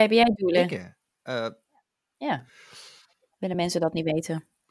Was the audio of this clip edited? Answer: no; 0 cuts

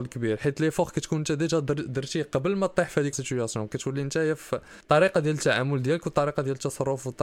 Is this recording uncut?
no; 2 cuts; at 3.1 s, 4.8 s

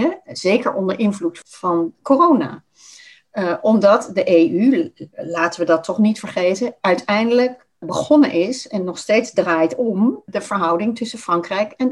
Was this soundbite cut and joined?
no; 0 cuts

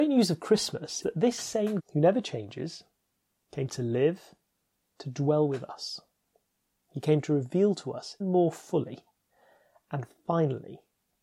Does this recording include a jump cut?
yes; 3 cuts; at 1.0 s, 1.8 s, 8.2 s

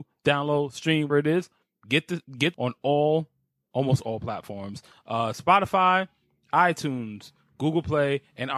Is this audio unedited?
no; 2 cuts; at 1.1 s, 2.5 s

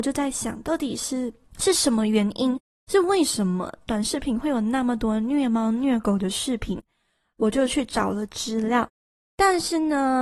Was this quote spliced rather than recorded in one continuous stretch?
no; 0 cuts

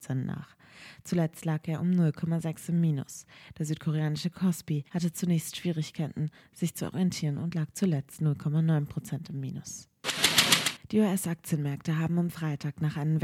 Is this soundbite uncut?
no; 1 cut; at 4.9 s

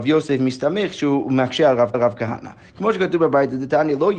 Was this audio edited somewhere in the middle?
yes; 1 cut; at 1.9 s

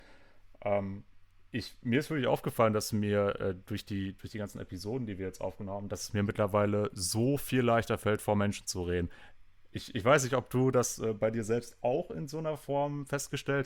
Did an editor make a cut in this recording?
no; 0 cuts

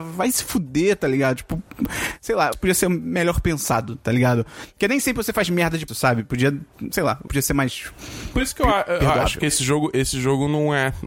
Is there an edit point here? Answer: yes; 3 cuts; at 2.5 s, 5.9 s, 7.3 s

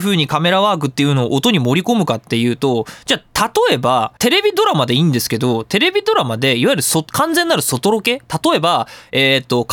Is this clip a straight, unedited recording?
no; 1 cut; at 4.2 s

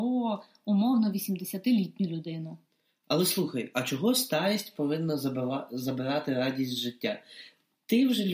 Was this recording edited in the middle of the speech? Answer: no; 0 cuts

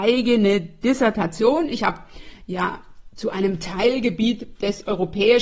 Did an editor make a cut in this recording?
no; 0 cuts

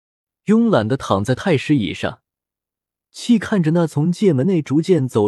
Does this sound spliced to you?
no; 0 cuts

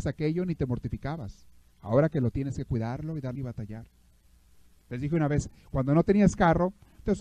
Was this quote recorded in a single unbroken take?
no; 3 cuts; at 1.7 s, 2.3 s, 3.4 s

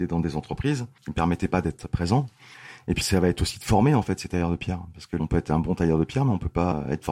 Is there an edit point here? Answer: yes; 1 cut; at 3.0 s

